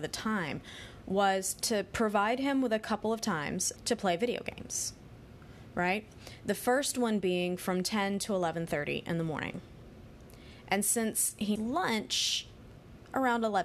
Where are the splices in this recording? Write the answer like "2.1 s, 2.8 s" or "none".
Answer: 3.8 s, 11.6 s